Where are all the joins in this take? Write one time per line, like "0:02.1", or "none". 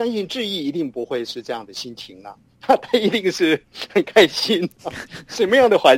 none